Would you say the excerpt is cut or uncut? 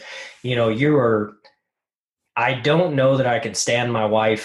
uncut